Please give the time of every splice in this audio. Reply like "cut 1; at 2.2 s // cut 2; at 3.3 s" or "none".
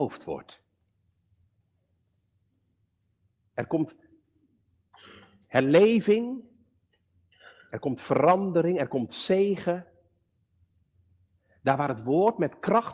none